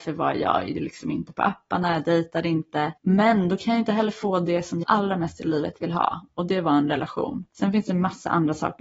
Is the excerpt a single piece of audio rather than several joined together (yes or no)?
no